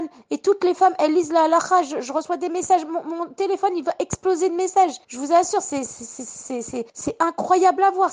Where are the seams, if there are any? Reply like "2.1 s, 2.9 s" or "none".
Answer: 5.0 s, 6.9 s